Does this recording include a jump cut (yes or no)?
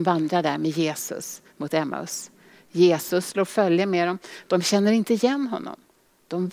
no